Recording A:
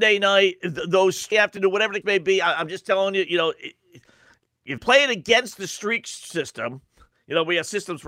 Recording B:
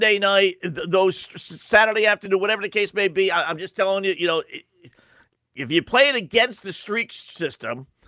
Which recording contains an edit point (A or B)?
A